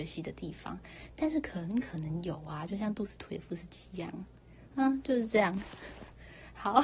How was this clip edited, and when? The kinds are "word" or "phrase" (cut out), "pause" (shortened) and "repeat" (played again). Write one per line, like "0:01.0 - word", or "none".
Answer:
none